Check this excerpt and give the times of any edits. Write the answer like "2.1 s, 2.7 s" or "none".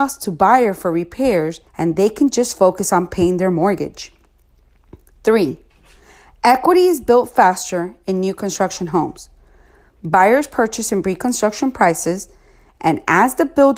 1.7 s

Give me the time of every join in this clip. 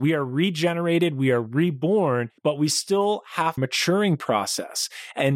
2.4 s, 3.6 s

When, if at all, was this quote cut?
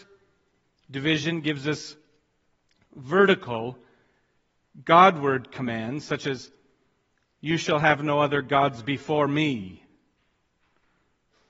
none

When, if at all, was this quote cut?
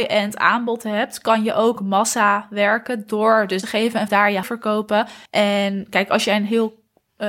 3.6 s, 4.1 s, 4.4 s, 5.3 s

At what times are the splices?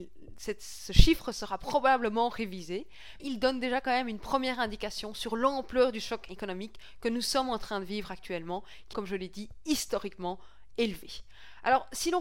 3.2 s, 8.9 s

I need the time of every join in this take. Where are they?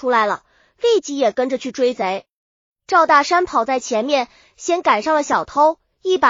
none

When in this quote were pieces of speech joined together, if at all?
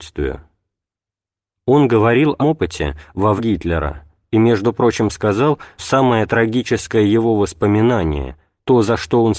2.4 s, 3.4 s, 5.8 s

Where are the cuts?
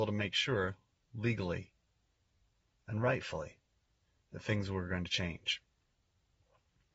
4.0 s

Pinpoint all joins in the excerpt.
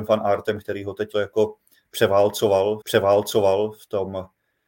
1.1 s, 2.8 s

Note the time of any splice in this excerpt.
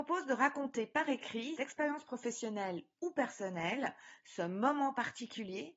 1.6 s

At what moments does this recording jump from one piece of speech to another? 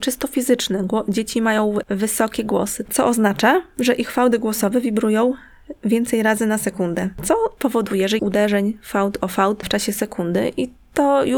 8.2 s

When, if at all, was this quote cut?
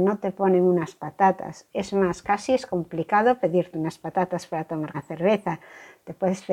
4.9 s

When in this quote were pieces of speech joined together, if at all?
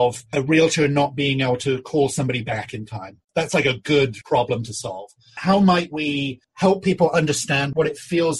3.2 s, 6.4 s

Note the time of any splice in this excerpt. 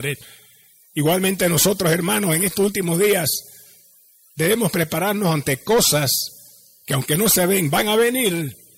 none

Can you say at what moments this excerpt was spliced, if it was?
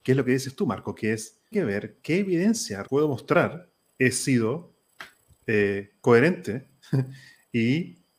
1.5 s, 2.0 s, 2.8 s, 3.9 s

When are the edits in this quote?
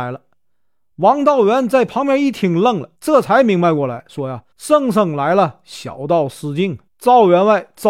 2.9 s, 4.5 s, 6.9 s

